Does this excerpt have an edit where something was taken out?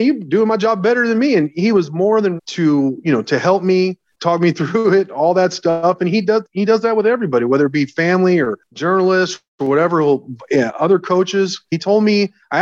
yes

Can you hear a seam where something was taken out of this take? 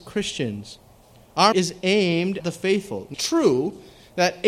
yes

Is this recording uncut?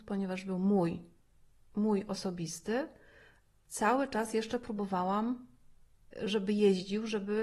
yes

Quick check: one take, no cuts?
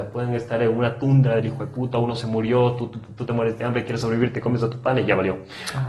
yes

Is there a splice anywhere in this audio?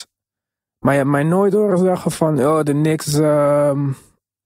no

